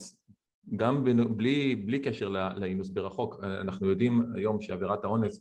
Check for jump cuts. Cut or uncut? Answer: uncut